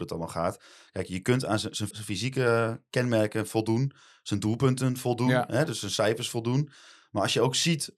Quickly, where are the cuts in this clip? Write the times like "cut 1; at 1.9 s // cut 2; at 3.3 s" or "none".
cut 1; at 1.9 s

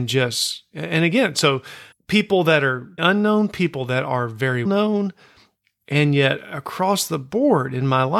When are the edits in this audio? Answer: cut 1; at 1.9 s // cut 2; at 3.0 s // cut 3; at 4.6 s

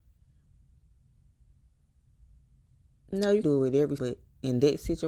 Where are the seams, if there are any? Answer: cut 1; at 3.4 s // cut 2; at 4.0 s

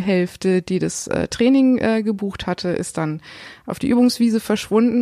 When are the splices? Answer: none

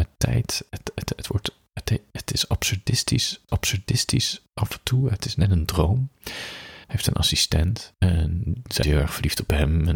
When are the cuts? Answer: cut 1; at 3.5 s // cut 2; at 6.8 s // cut 3; at 7.9 s // cut 4; at 8.8 s

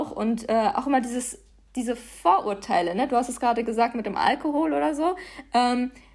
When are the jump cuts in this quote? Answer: none

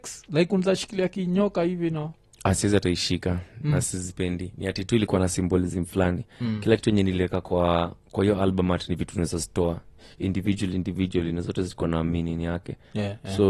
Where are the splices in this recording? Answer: none

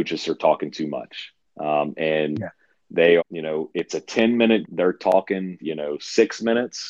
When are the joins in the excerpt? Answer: cut 1; at 1.4 s // cut 2; at 3.2 s // cut 3; at 3.9 s // cut 4; at 4.6 s // cut 5; at 5.6 s

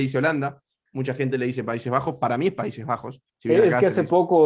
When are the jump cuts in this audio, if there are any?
cut 1; at 3.3 s

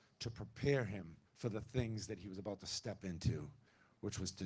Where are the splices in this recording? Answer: cut 1; at 1.3 s

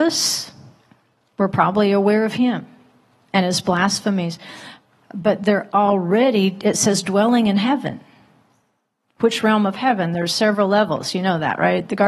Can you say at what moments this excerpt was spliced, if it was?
none

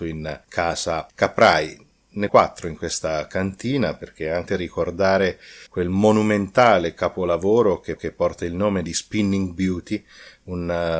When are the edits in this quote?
cut 1; at 2.3 s // cut 2; at 4.5 s // cut 3; at 5.7 s // cut 4; at 8.0 s

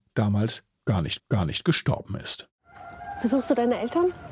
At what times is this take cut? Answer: cut 1; at 1.2 s

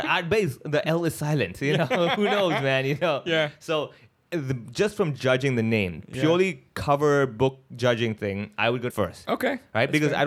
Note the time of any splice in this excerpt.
cut 1; at 8.9 s

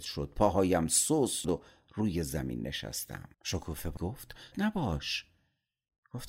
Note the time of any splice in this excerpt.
cut 1; at 1.4 s // cut 2; at 3.3 s // cut 3; at 4.0 s // cut 4; at 4.5 s

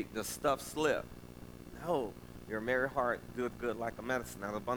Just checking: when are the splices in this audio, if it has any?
none

